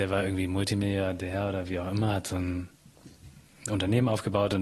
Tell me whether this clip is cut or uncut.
uncut